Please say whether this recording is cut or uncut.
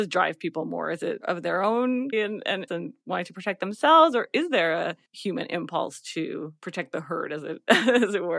cut